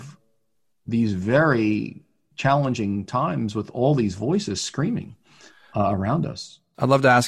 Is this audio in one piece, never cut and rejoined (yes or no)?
yes